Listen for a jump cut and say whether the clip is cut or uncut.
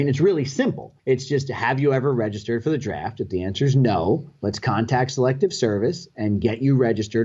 cut